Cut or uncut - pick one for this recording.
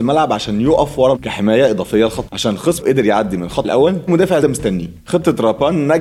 cut